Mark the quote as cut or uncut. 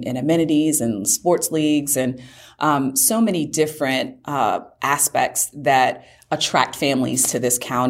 uncut